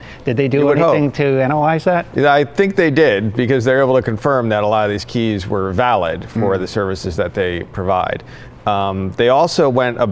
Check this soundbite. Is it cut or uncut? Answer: uncut